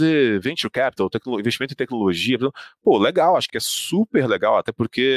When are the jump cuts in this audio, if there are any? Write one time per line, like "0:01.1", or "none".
0:03.5